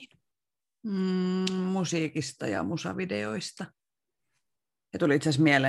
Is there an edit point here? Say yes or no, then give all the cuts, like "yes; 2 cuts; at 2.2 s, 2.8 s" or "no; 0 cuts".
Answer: no; 0 cuts